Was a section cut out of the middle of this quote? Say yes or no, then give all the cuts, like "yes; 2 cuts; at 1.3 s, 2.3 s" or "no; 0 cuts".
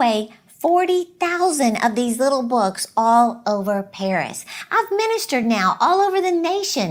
no; 0 cuts